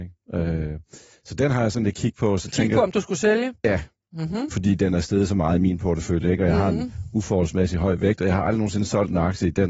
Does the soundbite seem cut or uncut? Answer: uncut